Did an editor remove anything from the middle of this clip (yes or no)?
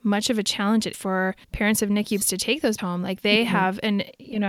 yes